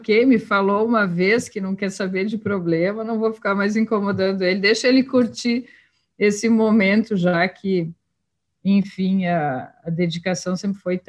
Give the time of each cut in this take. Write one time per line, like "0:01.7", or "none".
none